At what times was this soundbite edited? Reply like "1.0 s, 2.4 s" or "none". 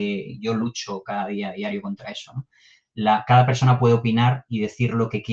none